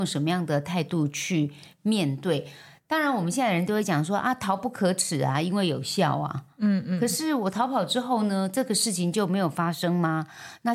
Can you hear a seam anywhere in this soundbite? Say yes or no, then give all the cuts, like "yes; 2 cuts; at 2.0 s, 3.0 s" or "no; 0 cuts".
no; 0 cuts